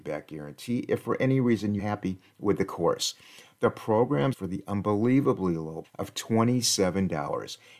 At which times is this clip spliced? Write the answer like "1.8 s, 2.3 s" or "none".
1.8 s, 4.3 s, 5.8 s